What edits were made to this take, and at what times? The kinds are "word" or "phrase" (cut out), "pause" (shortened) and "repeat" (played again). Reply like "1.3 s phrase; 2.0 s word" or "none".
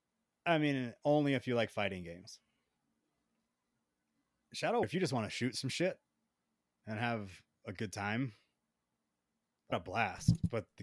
4.8 s word; 9.7 s word